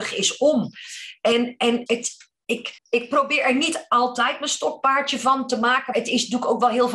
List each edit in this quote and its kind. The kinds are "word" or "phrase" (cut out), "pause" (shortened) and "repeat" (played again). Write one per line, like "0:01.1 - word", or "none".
0:01.9 - word
0:02.8 - pause
0:05.9 - word

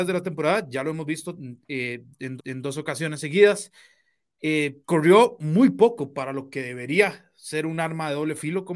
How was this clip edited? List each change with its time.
0:02.4 - repeat
0:04.8 - pause

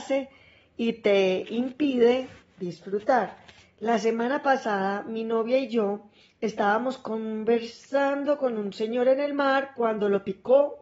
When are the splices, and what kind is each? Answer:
0:06.2 - pause

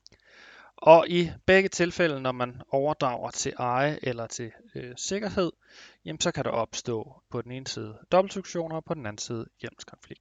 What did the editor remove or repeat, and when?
0:07.3 - pause
0:08.0 - pause

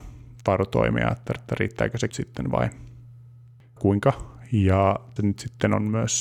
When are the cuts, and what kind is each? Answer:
0:01.4 - repeat
0:02.1 - phrase
0:03.8 - word
0:05.2 - word

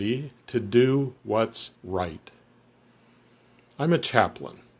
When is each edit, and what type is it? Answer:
0:01.7 - pause

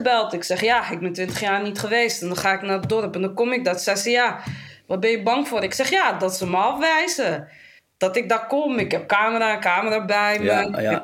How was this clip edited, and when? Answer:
none

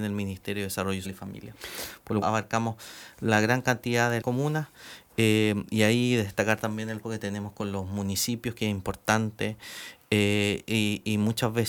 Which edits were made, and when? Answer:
0:01.0 - word
0:02.2 - phrase
0:04.2 - word
0:07.0 - word

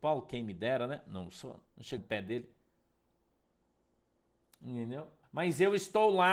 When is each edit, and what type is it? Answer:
0:01.7 - pause
0:02.0 - word
0:05.2 - pause

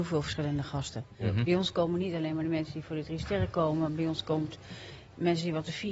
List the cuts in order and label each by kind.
none

